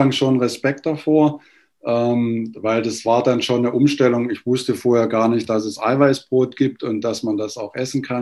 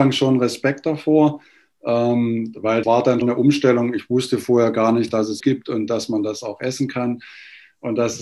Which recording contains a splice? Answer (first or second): second